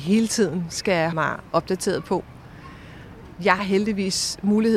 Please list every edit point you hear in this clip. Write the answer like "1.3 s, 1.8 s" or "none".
1.1 s, 3.6 s